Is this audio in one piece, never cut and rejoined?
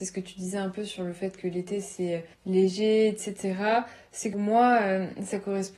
no; 2 cuts; at 2.3 s, 4.3 s

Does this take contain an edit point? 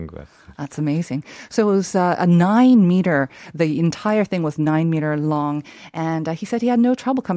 no; 0 cuts

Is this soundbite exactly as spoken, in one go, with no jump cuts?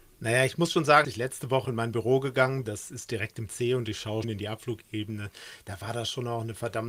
no; 5 cuts; at 1.0 s, 1.6 s, 2.7 s, 3.5 s, 4.2 s

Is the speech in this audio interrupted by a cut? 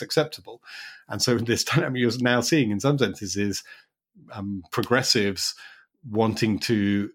no; 0 cuts

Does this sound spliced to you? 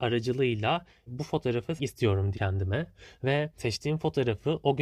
yes; 4 cuts; at 1.1 s, 1.8 s, 2.3 s, 3.6 s

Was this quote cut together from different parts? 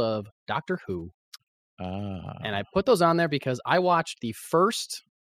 no; 0 cuts

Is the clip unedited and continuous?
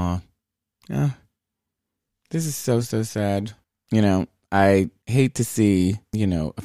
yes; 0 cuts

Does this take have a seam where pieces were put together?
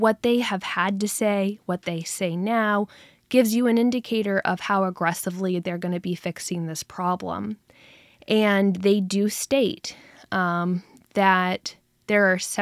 no; 0 cuts

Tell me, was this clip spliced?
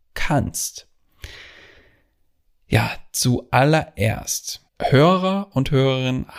yes; 1 cut; at 4.7 s

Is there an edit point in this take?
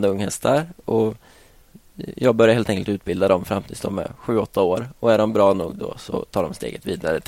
no; 0 cuts

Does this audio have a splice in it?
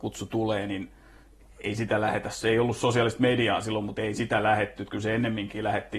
no; 0 cuts

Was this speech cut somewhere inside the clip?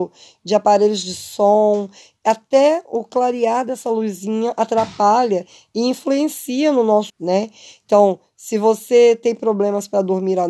yes; 1 cut; at 7.1 s

